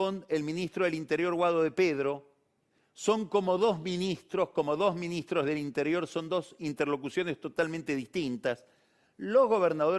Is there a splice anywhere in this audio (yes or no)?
no